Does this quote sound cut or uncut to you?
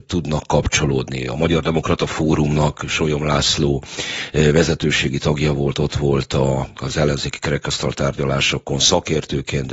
uncut